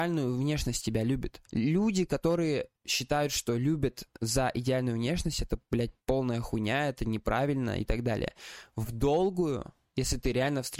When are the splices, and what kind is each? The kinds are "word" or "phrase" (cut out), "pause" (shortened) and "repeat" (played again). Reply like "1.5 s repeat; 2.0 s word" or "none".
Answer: 1.5 s pause; 2.8 s pause